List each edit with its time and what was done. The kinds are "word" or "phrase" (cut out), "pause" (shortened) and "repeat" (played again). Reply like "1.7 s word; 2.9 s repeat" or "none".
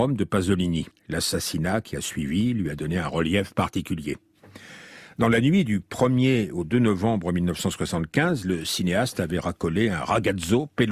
0.9 s pause